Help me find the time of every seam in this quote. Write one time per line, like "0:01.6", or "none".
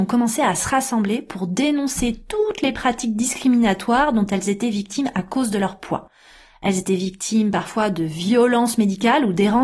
none